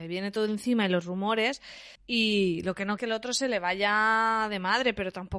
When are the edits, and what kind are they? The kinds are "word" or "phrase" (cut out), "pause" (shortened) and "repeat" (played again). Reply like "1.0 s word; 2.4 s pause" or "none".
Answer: 1.9 s pause; 3.0 s phrase

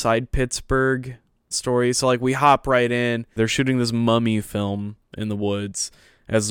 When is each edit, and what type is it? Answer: 1.5 s phrase

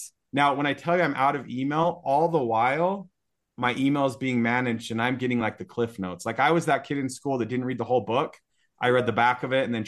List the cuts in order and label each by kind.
none

